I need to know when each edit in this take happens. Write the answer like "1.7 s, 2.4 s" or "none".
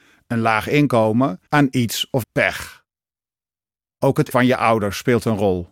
1.5 s, 2.2 s, 4.3 s